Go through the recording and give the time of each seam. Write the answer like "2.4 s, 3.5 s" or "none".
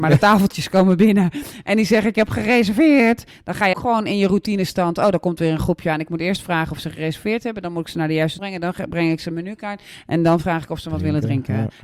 3.7 s, 8.4 s